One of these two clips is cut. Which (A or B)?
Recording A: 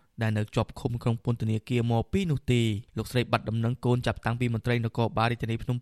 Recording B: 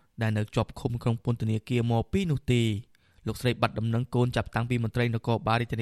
A